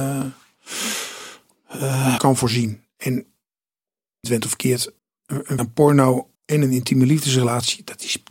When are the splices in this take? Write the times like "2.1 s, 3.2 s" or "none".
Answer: 2.2 s, 4.2 s, 5.0 s, 5.6 s, 6.3 s